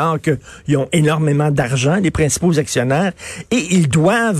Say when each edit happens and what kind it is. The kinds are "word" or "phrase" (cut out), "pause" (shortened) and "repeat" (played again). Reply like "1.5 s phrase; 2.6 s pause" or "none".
none